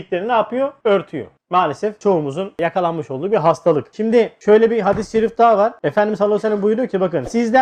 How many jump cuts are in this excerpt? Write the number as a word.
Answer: zero